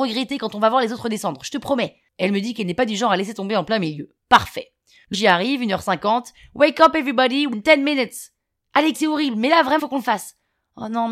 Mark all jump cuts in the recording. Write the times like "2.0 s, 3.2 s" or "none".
5.1 s, 7.5 s, 8.9 s, 9.8 s

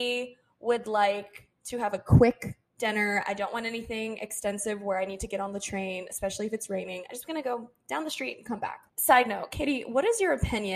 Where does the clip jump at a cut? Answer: 2.7 s, 8.9 s

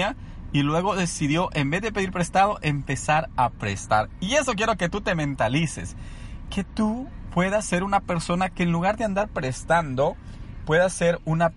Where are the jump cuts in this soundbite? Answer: none

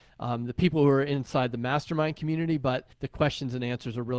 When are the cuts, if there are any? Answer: 2.9 s

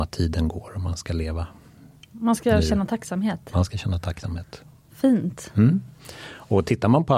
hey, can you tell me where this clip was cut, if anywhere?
none

